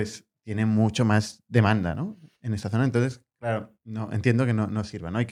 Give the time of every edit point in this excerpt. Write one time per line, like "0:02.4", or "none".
0:02.3
0:03.8

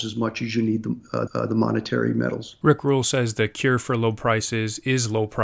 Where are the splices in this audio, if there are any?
0:01.3

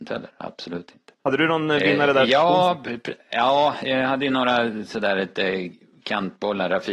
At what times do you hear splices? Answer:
0:01.2

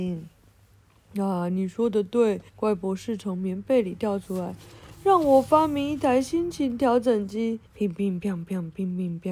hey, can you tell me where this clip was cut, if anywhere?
0:02.5
0:07.7

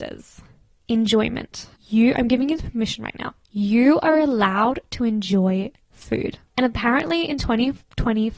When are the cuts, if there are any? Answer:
0:01.7
0:03.4
0:06.5

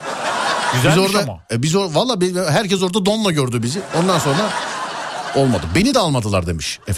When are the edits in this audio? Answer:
none

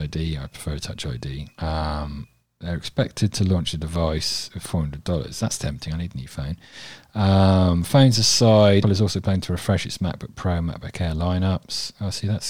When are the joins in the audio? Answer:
0:01.5
0:08.8

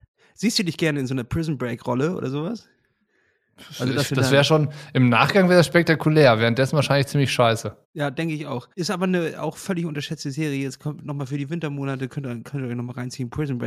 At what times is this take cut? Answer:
0:07.8
0:08.7

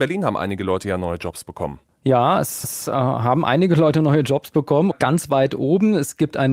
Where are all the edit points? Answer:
0:02.6
0:04.9

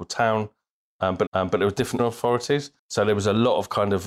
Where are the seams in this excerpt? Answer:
0:01.3
0:02.0
0:02.8

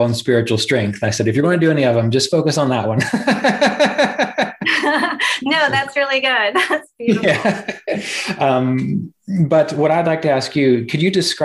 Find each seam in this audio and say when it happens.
none

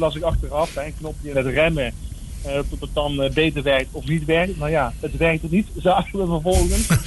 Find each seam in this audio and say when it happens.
0:01.3

